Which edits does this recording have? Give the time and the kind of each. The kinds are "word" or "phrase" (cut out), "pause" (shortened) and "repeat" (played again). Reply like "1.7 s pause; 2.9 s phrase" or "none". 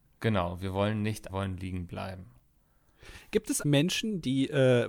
1.3 s phrase; 3.6 s word